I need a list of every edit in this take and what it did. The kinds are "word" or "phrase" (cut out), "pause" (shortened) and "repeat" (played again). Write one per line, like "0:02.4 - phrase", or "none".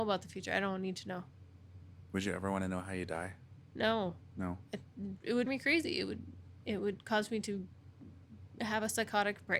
0:05.5 - word